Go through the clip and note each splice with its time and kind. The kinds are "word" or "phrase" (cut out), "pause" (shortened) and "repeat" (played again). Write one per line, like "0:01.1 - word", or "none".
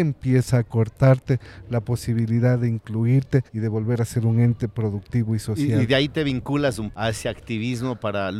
0:03.5 - pause
0:06.9 - word